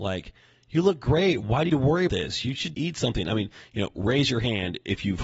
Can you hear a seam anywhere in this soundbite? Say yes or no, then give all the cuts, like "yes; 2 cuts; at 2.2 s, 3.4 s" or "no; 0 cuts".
yes; 3 cuts; at 1.7 s, 2.1 s, 2.7 s